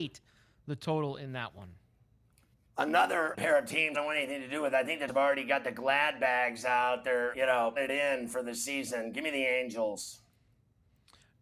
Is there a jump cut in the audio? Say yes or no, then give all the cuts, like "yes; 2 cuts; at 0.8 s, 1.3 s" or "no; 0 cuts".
yes; 5 cuts; at 3.3 s, 3.9 s, 5.1 s, 7.3 s, 7.8 s